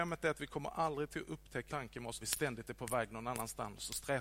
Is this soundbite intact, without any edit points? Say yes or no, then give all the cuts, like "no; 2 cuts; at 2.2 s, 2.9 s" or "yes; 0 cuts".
no; 2 cuts; at 1.7 s, 2.2 s